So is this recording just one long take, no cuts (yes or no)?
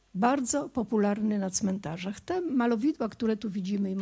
yes